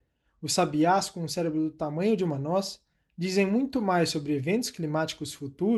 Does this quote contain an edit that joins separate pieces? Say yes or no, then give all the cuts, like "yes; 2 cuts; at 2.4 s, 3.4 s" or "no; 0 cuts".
no; 0 cuts